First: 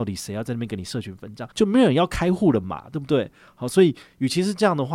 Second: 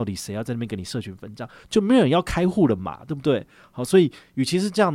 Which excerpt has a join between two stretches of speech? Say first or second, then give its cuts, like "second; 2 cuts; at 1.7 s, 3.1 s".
first; 1 cut; at 1.5 s